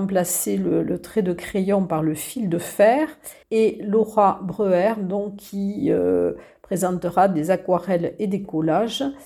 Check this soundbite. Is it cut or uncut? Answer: cut